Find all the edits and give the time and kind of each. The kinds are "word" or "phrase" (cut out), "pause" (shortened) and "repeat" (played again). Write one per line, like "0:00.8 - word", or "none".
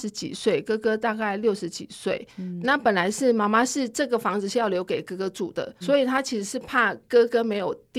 0:02.6 - word
0:05.8 - word